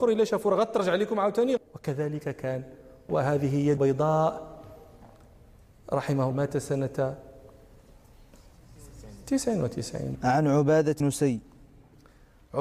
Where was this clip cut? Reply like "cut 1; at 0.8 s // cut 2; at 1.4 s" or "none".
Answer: cut 1; at 1.6 s // cut 2; at 3.1 s // cut 3; at 3.8 s // cut 4; at 6.3 s // cut 5; at 10.2 s // cut 6; at 11.0 s

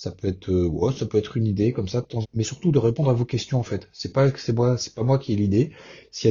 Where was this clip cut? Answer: cut 1; at 2.2 s

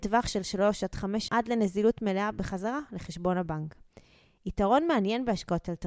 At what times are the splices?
cut 1; at 1.3 s

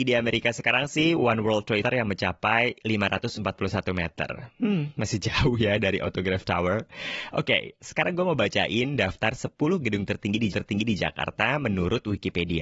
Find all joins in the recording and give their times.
cut 1; at 1.8 s // cut 2; at 10.5 s

